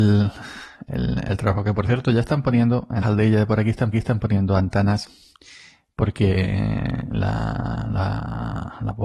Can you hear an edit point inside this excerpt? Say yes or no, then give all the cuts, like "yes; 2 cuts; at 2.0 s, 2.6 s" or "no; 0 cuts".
yes; 2 cuts; at 3.0 s, 3.9 s